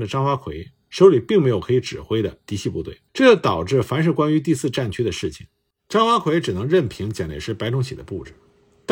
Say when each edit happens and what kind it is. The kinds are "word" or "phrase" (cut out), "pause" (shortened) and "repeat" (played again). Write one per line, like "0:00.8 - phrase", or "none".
0:03.1 - pause